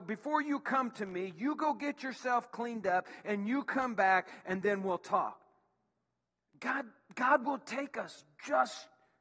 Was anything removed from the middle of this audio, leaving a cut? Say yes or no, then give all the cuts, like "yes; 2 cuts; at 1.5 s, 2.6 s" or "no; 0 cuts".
no; 0 cuts